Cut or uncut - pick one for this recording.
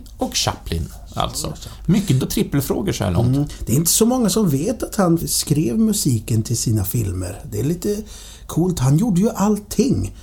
cut